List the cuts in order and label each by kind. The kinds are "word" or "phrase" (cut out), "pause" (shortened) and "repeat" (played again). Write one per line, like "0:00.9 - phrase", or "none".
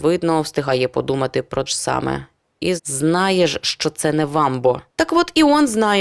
0:01.7 - word
0:02.8 - word
0:04.9 - pause